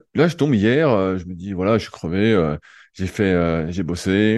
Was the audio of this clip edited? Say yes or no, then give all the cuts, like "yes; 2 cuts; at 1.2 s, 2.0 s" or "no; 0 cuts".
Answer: no; 0 cuts